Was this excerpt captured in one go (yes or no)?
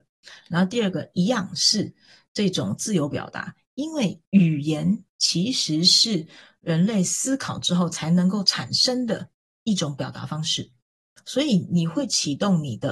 yes